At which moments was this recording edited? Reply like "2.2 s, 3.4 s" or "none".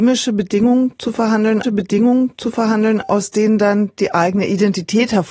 1.6 s